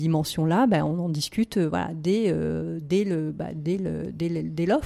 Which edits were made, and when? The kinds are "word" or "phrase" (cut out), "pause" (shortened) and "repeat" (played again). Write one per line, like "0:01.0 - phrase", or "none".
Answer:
none

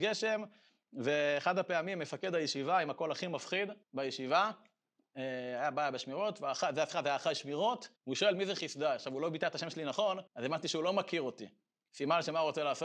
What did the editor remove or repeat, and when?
0:03.8 - pause
0:08.0 - pause
0:10.3 - pause

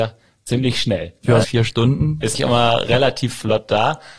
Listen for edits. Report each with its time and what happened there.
0:01.4 - phrase
0:02.3 - word

